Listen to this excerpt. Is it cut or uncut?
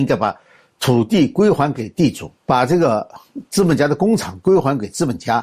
cut